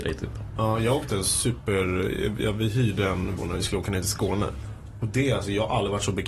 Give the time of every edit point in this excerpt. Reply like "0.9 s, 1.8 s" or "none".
3.4 s